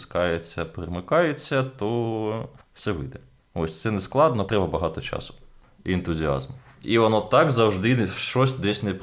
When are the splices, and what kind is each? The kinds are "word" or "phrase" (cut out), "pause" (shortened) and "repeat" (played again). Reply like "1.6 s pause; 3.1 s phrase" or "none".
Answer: 4.5 s word